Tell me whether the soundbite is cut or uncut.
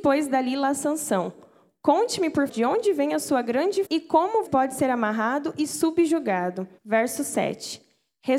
cut